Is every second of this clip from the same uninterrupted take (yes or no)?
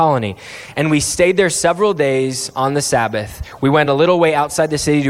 yes